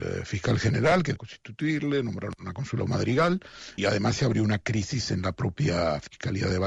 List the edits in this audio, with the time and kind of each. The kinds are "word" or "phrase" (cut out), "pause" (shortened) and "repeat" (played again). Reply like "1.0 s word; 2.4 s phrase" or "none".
1.2 s phrase; 3.8 s word

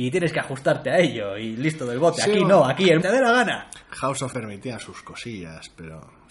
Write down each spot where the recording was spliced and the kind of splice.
3.0 s phrase; 4.3 s word

